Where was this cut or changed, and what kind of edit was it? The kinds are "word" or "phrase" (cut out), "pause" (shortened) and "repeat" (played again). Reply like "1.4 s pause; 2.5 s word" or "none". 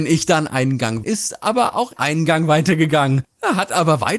1.0 s word; 2.0 s word